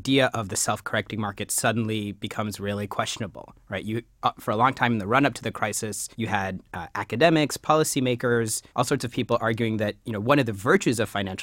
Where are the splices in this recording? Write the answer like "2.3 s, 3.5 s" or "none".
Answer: 6.1 s, 8.7 s